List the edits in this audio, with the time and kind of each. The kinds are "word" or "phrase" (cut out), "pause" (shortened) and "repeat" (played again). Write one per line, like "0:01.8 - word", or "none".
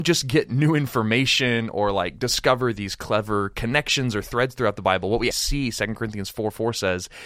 0:05.3 - word